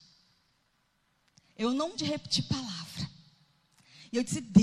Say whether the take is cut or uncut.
cut